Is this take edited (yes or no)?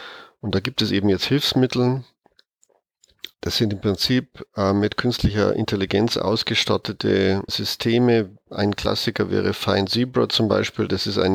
yes